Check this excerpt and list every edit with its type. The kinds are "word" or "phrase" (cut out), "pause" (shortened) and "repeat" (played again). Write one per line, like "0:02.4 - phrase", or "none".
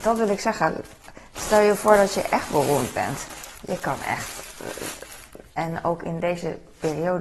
none